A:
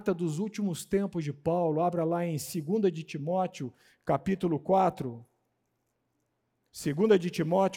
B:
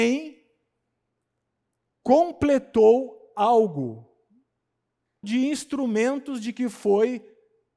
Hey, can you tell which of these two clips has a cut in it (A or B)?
B